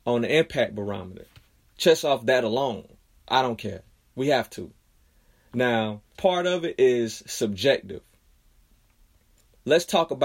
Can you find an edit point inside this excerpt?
yes; 1 cut; at 6.1 s

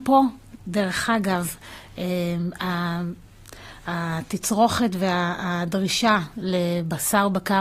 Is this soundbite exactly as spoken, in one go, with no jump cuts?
yes; 0 cuts

